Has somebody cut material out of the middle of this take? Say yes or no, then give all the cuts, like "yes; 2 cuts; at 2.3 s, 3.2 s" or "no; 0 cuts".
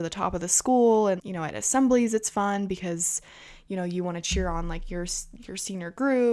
yes; 1 cut; at 1.2 s